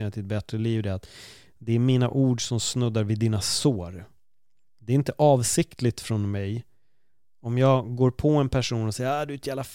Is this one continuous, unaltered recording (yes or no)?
yes